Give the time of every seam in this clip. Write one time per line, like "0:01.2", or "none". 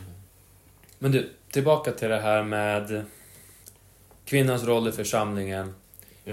none